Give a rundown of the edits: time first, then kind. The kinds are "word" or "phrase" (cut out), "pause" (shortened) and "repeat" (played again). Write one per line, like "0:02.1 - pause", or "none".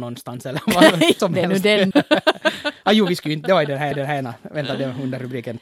0:01.2 - phrase
0:01.9 - word
0:03.9 - repeat